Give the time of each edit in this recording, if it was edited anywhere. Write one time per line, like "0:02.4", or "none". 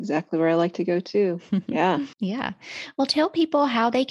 0:02.1